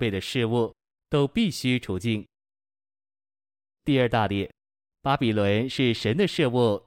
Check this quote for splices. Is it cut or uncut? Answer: uncut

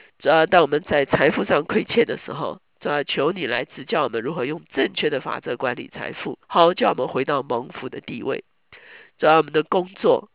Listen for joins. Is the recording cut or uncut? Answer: cut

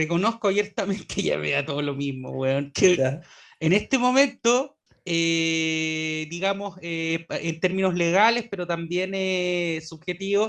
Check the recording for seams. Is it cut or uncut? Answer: cut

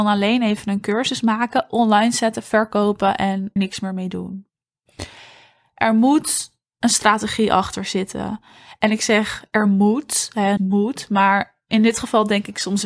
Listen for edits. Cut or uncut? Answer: cut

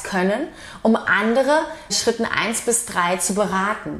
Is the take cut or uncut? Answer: cut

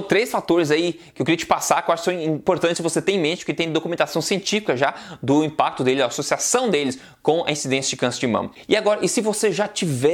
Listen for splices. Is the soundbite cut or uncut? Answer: uncut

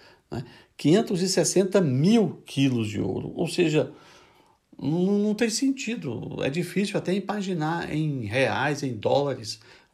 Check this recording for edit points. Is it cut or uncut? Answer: uncut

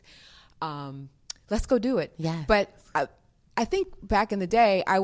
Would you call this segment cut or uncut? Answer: uncut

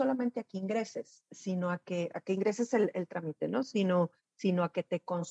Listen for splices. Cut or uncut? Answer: uncut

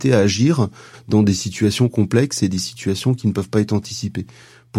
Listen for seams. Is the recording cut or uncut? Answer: uncut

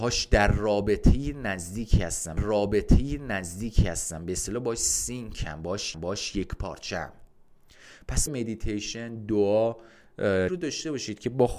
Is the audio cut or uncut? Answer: cut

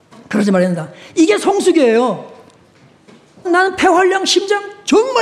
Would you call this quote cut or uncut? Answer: cut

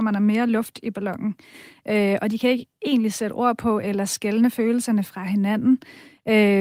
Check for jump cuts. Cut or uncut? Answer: uncut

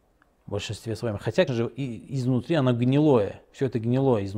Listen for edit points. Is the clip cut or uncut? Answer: cut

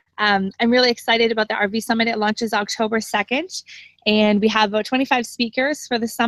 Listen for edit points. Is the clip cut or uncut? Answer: uncut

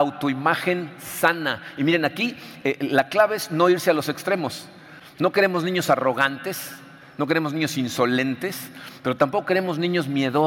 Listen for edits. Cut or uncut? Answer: uncut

